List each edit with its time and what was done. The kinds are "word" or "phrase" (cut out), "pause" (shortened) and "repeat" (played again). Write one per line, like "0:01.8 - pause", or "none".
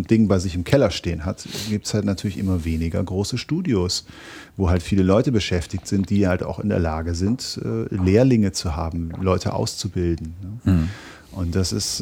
none